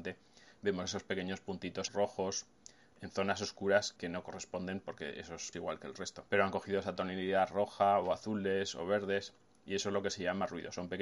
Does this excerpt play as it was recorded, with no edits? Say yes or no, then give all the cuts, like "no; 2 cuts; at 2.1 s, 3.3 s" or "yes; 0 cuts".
no; 4 cuts; at 1.9 s, 4.0 s, 5.5 s, 6.3 s